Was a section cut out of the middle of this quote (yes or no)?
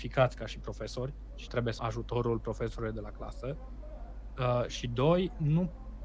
yes